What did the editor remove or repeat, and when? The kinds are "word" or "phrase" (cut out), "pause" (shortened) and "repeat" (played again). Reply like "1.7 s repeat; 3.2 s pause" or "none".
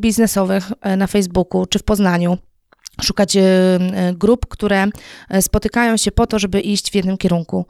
none